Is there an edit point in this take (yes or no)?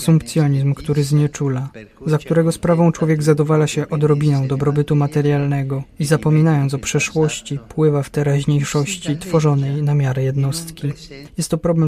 no